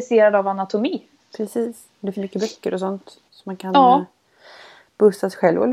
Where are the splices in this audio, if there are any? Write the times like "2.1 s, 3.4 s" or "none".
2.1 s